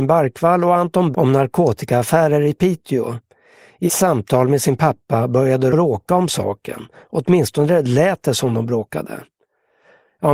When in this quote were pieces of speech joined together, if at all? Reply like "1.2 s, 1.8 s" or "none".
1.1 s, 3.9 s, 5.7 s